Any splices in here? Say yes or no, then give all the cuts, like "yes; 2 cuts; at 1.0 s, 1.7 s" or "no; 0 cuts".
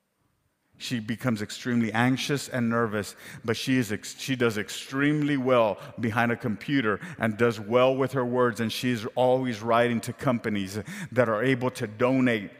no; 0 cuts